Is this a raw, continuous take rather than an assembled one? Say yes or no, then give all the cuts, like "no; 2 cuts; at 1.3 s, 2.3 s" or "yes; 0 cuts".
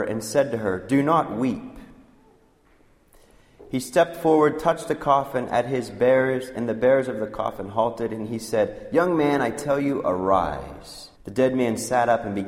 no; 1 cut; at 11.1 s